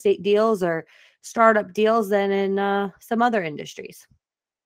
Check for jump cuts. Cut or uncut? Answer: uncut